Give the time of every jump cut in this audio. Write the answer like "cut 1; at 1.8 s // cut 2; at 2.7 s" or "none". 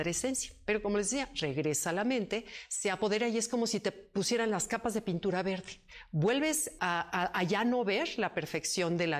cut 1; at 6.8 s